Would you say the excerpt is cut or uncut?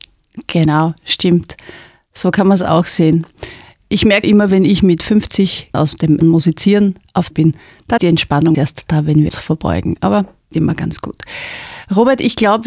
cut